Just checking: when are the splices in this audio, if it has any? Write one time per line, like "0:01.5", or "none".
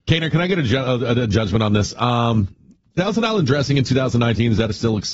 none

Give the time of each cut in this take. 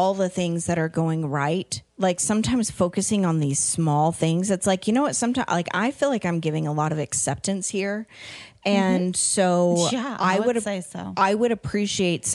0:01.9

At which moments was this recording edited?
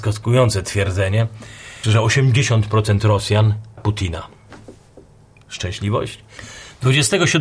0:01.8
0:03.8

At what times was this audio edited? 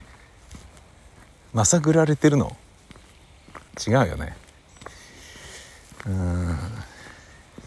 0:03.7

